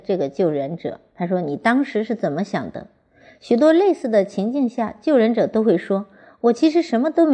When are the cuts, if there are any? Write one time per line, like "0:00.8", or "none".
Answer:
none